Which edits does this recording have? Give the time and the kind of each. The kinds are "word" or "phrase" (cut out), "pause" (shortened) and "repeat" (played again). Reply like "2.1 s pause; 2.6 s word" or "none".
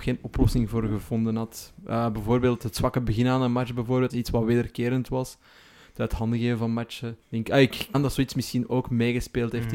4.1 s word; 7.2 s pause; 7.9 s word